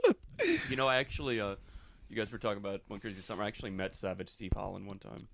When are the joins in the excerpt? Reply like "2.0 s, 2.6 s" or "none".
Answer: none